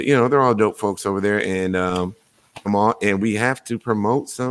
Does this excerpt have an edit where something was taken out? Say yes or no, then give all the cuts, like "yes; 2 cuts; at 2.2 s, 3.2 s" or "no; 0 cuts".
yes; 1 cut; at 2.7 s